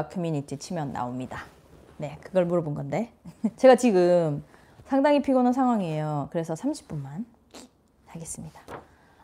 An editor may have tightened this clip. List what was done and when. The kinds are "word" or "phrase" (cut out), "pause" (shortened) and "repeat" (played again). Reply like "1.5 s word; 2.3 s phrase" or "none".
3.6 s word